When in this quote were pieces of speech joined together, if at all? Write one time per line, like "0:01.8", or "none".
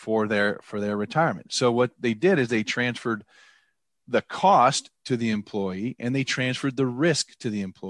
none